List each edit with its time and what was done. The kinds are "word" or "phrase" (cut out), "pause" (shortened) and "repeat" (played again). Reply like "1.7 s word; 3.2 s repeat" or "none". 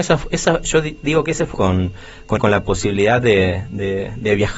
1.5 s phrase; 2.4 s phrase

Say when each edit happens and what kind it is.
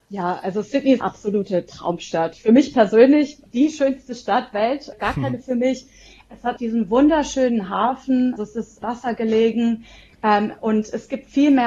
1.0 s word; 3.5 s word; 4.5 s word; 4.9 s word; 5.4 s word; 6.6 s word; 8.4 s word; 8.8 s word

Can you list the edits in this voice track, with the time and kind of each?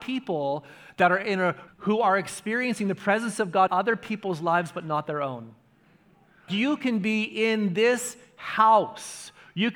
1.7 s word; 3.7 s word; 6.5 s word

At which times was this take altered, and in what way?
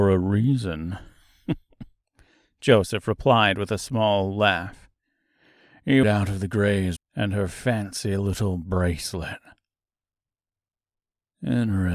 6.0 s phrase; 7.0 s phrase

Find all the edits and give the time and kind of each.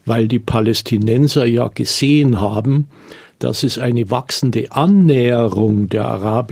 none

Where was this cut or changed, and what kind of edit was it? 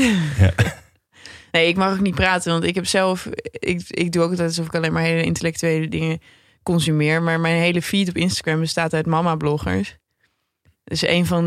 none

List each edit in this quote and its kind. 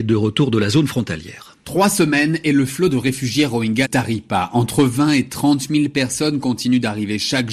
3.8 s word

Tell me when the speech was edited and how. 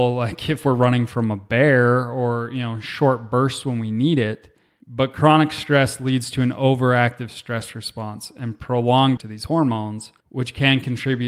9.2 s word; 10.2 s pause

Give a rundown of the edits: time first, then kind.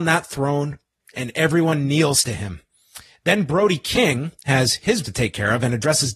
5.0 s word

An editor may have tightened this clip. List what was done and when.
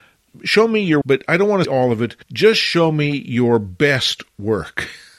1.0 s word; 1.6 s word; 2.2 s pause

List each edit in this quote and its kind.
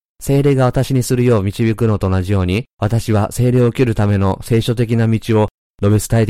2.7 s pause

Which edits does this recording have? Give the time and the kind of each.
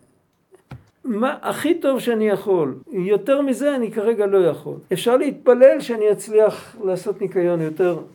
0.9 s pause; 2.8 s pause; 4.9 s pause

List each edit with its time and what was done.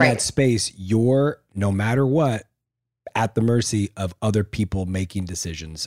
none

